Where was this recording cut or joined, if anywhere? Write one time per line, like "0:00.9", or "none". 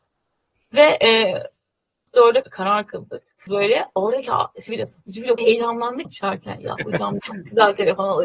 0:02.1
0:02.4
0:03.5
0:04.7
0:05.4
0:06.0
0:07.2